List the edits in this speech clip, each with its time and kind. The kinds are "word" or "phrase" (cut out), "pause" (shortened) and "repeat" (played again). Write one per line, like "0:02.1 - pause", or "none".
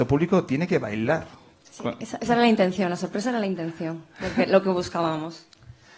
none

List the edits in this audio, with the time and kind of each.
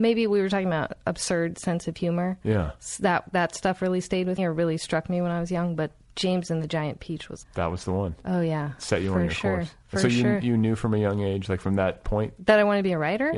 0:04.4 - word
0:07.4 - word

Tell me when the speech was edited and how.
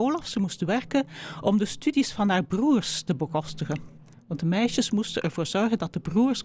none

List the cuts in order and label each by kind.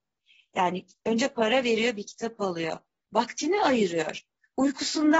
none

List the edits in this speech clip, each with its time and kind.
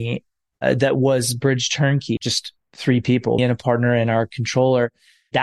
0:02.2 - phrase
0:03.4 - word

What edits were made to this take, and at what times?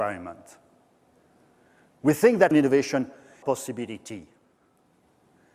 0:02.5 - word
0:03.4 - phrase

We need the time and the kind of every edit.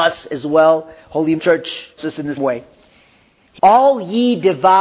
0:01.4 - word
0:02.0 - word
0:02.4 - word
0:03.6 - word

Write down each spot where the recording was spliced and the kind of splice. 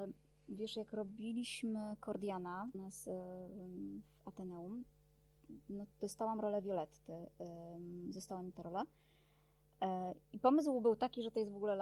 0:02.7 - word
0:05.9 - pause
0:08.5 - word
0:10.2 - pause

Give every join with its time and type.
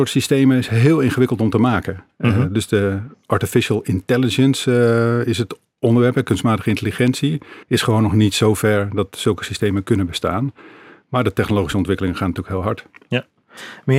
0:07.6 - pause

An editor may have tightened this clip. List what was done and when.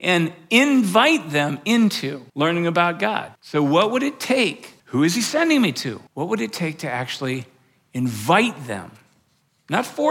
0:02.3 - pause
0:03.4 - pause
0:04.8 - pause
0:06.1 - pause

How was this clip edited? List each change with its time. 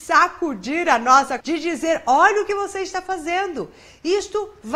0:01.4 - word

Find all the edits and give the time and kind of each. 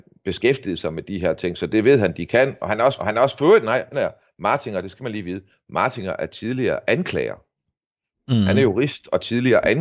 0:03.0 - repeat
0:03.9 - word

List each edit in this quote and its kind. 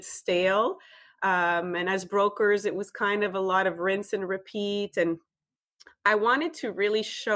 none

